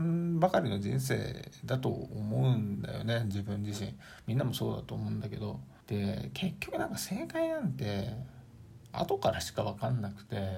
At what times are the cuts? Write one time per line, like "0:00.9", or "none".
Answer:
0:05.8